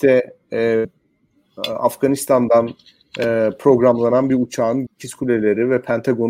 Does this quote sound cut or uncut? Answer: cut